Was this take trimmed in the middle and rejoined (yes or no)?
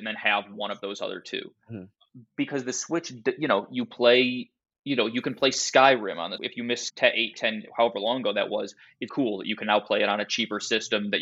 yes